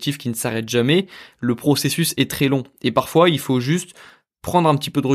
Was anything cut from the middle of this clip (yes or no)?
no